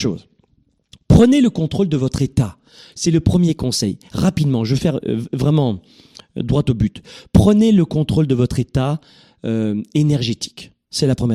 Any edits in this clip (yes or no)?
no